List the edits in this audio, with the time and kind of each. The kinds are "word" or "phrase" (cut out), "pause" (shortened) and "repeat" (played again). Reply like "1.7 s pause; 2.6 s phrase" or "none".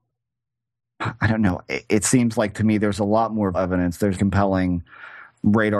3.5 s word; 4.1 s phrase

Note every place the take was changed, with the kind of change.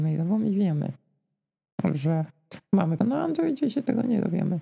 3.0 s word

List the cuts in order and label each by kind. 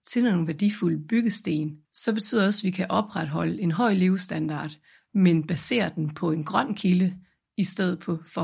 1.8 s pause

